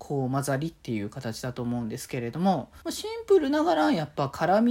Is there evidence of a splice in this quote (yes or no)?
yes